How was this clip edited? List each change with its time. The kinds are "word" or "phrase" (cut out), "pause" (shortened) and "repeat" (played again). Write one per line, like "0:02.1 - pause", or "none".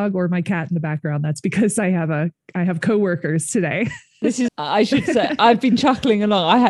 0:04.5 - word